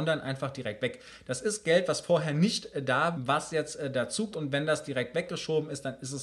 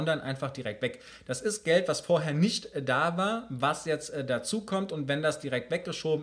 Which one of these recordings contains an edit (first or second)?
first